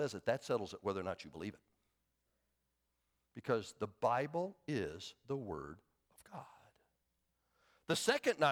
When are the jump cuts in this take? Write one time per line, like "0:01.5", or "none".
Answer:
none